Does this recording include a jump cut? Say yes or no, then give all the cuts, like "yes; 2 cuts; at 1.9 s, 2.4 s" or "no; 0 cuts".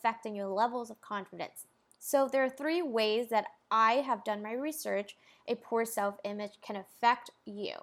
no; 0 cuts